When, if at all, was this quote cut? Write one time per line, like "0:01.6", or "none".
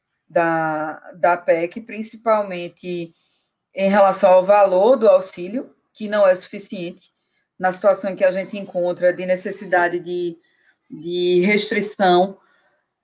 none